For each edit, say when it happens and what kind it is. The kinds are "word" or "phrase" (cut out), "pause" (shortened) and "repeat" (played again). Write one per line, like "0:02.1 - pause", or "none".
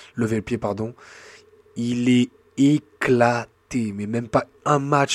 none